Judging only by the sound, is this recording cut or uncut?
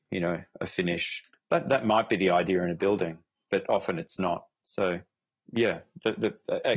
uncut